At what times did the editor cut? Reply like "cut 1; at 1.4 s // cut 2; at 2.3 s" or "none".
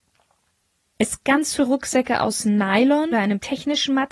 cut 1; at 1.2 s // cut 2; at 1.6 s // cut 3; at 3.1 s

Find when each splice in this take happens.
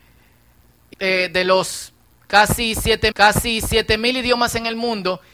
cut 1; at 0.9 s // cut 2; at 3.1 s

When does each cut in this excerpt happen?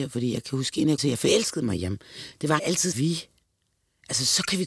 cut 1; at 1.0 s // cut 2; at 2.6 s // cut 3; at 2.9 s

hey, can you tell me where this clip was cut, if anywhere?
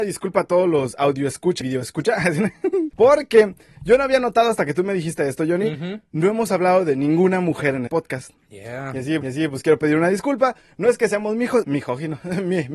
cut 1; at 1.6 s // cut 2; at 7.9 s // cut 3; at 9.2 s // cut 4; at 11.6 s

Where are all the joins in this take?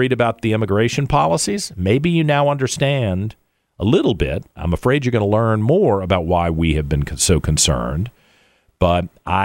none

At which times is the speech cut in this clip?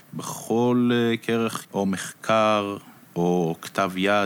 cut 1; at 1.6 s

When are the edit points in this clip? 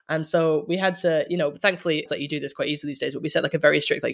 cut 1; at 2.1 s

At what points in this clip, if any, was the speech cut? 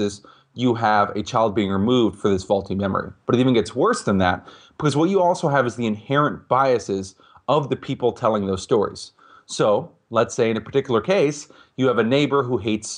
cut 1; at 3.2 s

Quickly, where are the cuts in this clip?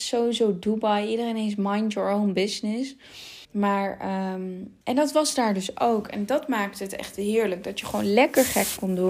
cut 1; at 3.4 s // cut 2; at 4.8 s

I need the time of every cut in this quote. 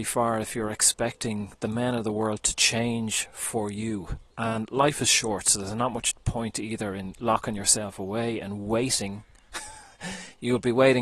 cut 1; at 4.3 s

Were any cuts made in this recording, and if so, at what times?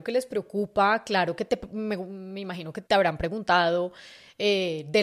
cut 1; at 2.9 s

